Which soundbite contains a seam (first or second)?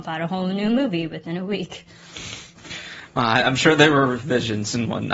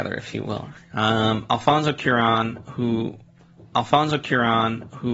second